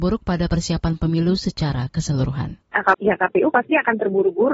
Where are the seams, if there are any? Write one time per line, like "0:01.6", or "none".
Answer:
0:02.6
0:02.9